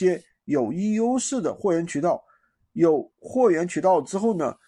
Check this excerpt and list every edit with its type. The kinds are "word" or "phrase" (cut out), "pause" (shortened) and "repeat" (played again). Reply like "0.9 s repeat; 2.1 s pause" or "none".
3.1 s pause